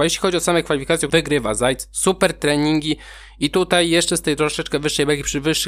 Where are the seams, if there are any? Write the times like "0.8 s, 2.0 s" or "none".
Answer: 1.1 s